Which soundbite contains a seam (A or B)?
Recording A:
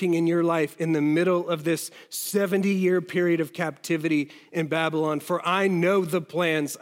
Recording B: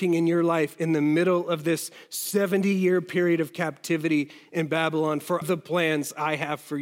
B